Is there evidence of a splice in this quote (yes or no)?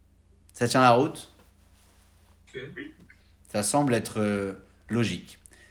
no